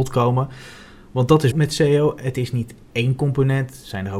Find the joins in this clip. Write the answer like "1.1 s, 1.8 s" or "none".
1.5 s